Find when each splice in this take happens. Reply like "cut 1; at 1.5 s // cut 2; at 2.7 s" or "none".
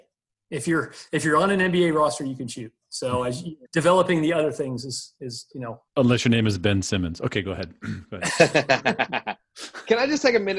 cut 1; at 3.7 s // cut 2; at 5.9 s